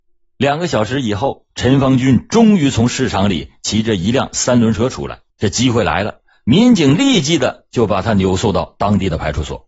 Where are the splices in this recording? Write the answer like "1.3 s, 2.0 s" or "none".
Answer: 1.5 s, 5.3 s